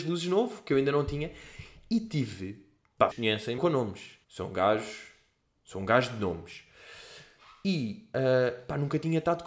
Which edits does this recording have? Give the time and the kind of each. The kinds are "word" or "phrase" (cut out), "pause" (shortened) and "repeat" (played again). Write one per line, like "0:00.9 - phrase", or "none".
0:03.1 - word
0:03.6 - phrase
0:04.2 - pause